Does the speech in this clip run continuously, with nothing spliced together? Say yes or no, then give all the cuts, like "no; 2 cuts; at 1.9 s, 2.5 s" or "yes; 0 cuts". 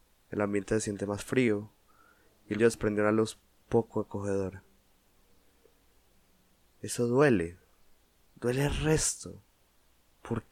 no; 1 cut; at 2.6 s